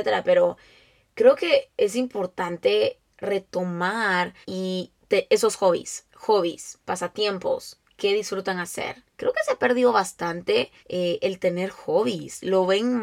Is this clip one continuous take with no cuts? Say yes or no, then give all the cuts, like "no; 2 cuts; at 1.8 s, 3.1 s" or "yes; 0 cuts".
no; 5 cuts; at 4.4 s, 6.1 s, 7.9 s, 9.1 s, 10.8 s